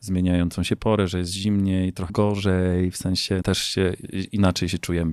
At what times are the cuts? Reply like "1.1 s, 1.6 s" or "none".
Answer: 2.1 s, 3.4 s

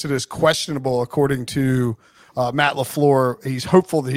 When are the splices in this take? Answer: none

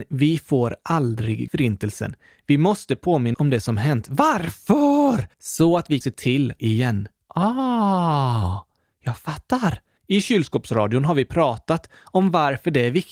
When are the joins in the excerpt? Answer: 1.5 s, 3.3 s, 5.3 s, 6.0 s, 6.6 s, 10.0 s

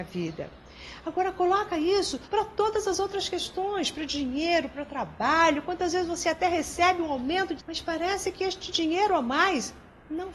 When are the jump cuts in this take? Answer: 2.2 s, 7.6 s

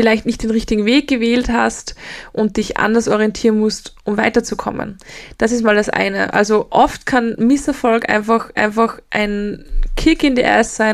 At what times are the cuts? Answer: 8.6 s

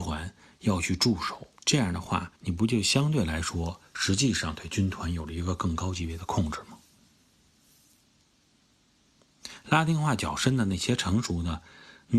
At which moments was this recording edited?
1.6 s, 2.4 s

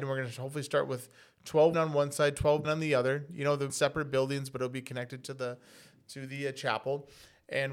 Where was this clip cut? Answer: 1.7 s, 2.6 s, 3.7 s

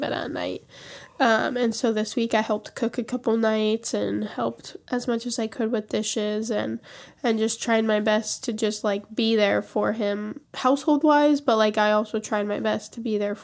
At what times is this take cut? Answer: 10.4 s

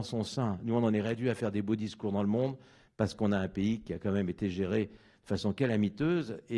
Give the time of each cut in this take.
none

